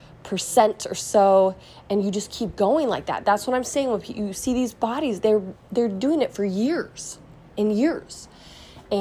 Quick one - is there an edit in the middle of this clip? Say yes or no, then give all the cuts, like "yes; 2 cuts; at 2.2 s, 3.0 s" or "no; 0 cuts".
no; 0 cuts